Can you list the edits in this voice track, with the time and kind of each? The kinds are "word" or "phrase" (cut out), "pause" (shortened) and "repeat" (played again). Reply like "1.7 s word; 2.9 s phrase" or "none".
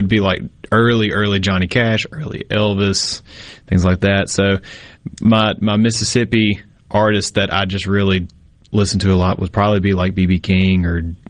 none